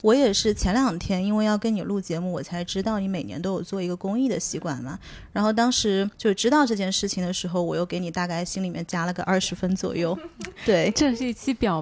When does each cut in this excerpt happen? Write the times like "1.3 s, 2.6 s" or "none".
6.1 s